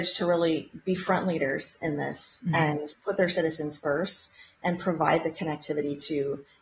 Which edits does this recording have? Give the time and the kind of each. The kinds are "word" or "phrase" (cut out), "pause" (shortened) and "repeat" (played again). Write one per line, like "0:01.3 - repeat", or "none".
none